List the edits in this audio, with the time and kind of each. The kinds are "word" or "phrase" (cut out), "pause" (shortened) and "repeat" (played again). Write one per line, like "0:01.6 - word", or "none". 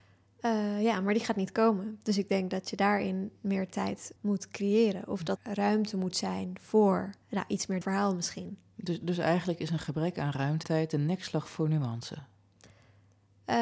0:04.2 - word
0:05.4 - word
0:07.2 - pause
0:07.8 - phrase
0:09.0 - word
0:10.6 - word

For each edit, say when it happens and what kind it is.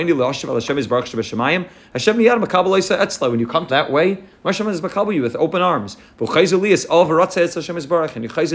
0:03.7 - phrase

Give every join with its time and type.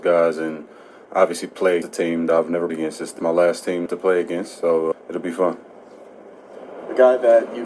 0:01.8 - word
0:02.3 - word
0:02.7 - word
0:03.2 - word
0:03.9 - word
0:04.9 - word

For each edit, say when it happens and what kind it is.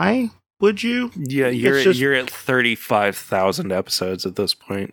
0:02.3 - word

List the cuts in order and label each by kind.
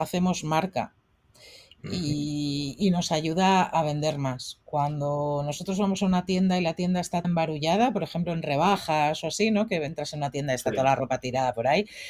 0:07.2 - word

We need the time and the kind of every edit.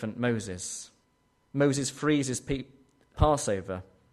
0:01.0 - pause
0:03.1 - phrase

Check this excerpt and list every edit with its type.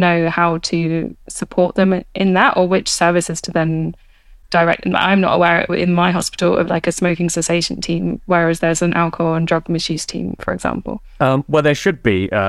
0:01.2 - pause

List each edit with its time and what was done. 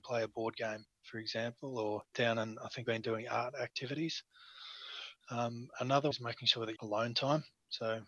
0:00.9 - pause
0:02.1 - word
0:02.8 - word
0:05.2 - pause
0:06.1 - word
0:06.8 - phrase

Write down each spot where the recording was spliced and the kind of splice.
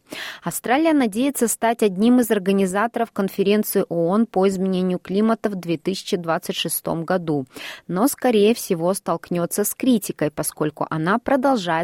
none

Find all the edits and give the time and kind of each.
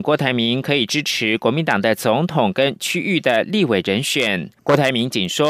0:04.6 - pause

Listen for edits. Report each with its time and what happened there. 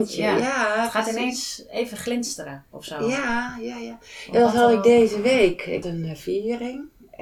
0:05.8 - word

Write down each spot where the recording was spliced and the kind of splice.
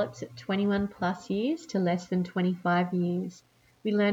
none

